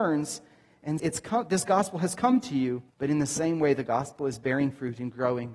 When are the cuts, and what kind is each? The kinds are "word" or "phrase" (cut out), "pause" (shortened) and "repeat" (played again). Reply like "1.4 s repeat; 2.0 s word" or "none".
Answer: 1.0 s word; 2.9 s pause